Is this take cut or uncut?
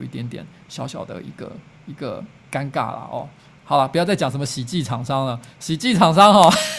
uncut